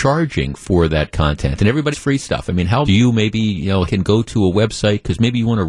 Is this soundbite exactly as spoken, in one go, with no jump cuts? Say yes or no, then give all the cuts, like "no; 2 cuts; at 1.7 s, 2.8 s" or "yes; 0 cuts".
no; 3 cuts; at 1.9 s, 2.8 s, 3.9 s